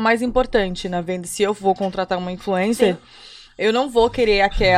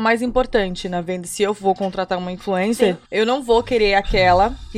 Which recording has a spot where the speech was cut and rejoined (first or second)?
second